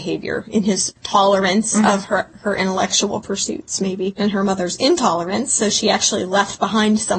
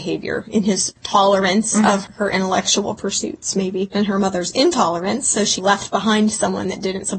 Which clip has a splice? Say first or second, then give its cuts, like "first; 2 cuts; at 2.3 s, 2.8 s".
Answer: second; 2 cuts; at 2.1 s, 5.6 s